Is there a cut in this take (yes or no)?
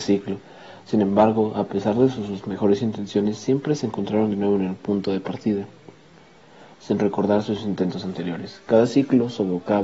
no